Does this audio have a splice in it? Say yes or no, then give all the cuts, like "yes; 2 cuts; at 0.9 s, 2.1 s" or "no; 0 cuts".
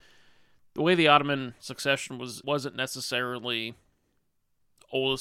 yes; 1 cut; at 2.4 s